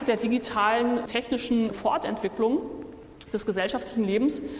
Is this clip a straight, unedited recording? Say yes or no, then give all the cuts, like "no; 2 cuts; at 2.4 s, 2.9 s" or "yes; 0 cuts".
yes; 0 cuts